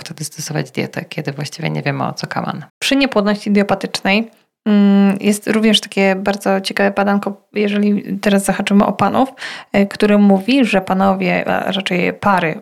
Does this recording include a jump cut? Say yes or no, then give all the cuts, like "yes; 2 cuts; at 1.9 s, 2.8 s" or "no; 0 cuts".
yes; 1 cut; at 2.7 s